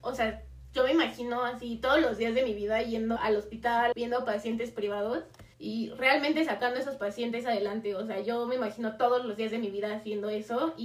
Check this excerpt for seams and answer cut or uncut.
cut